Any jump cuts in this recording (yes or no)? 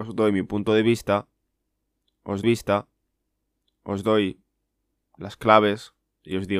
yes